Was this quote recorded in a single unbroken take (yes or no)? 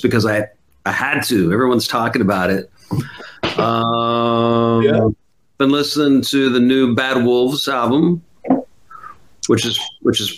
yes